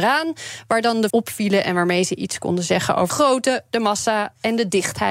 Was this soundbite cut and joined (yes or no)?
yes